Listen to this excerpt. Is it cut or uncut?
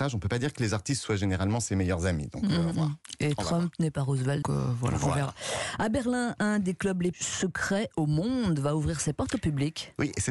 cut